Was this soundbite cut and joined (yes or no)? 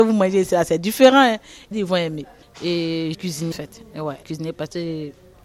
yes